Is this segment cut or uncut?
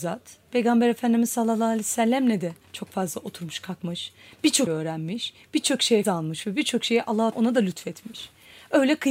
cut